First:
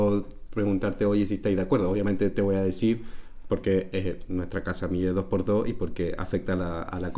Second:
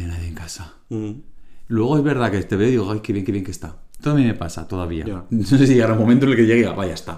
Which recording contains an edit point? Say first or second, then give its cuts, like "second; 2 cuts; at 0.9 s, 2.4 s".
second; 1 cut; at 3.3 s